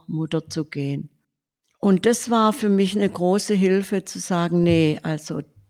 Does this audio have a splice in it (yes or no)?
no